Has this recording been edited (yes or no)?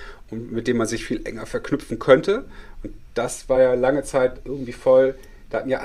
no